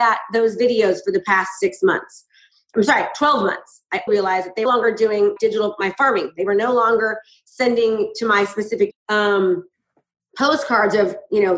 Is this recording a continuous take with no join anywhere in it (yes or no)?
no